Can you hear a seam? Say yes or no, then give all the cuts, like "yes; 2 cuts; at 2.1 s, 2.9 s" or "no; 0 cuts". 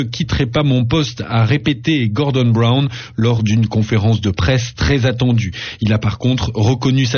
no; 0 cuts